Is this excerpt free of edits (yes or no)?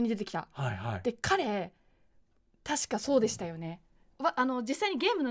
yes